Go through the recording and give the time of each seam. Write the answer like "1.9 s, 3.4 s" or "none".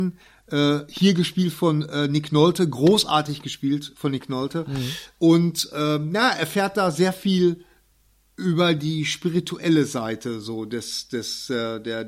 none